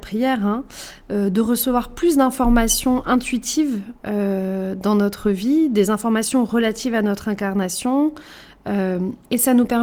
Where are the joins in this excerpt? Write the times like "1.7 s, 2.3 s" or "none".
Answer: none